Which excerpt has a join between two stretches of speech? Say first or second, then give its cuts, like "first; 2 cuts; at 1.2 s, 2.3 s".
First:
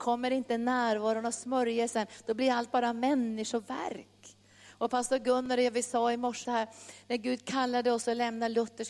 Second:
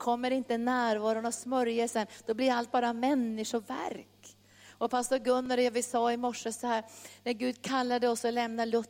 first; 1 cut; at 6.4 s